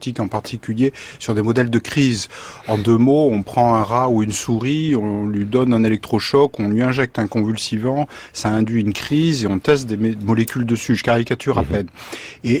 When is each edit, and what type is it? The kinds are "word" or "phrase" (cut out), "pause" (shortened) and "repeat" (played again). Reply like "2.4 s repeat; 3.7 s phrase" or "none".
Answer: none

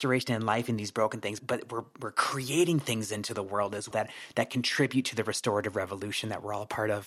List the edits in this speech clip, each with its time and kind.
1.4 s word; 3.9 s word

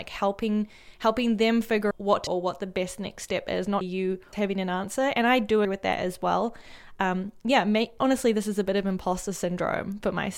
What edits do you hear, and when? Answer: 1.9 s word; 2.3 s word; 3.8 s word; 4.3 s word; 5.6 s word; 8.0 s word

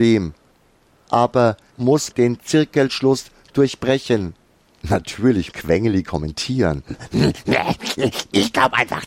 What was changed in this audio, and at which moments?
1.7 s word; 2.1 s word; 5.5 s word

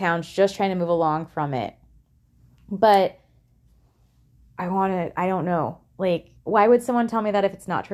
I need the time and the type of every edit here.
6.4 s pause

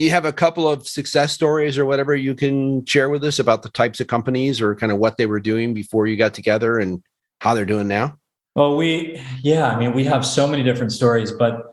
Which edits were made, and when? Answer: none

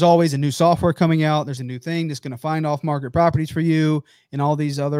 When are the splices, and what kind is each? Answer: 1.6 s word

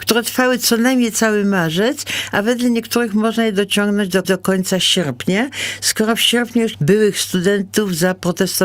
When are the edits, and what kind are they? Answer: 4.2 s repeat; 6.7 s word

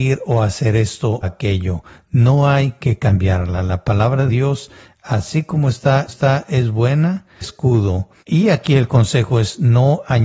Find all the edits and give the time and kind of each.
1.2 s word; 4.3 s word; 6.1 s repeat; 7.4 s phrase; 8.2 s pause

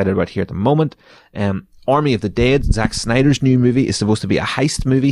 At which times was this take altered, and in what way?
none

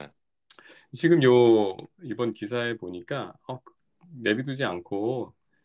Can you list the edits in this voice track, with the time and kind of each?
none

